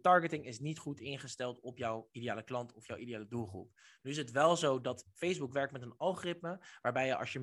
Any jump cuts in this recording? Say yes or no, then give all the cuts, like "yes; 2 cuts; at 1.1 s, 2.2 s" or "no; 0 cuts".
no; 0 cuts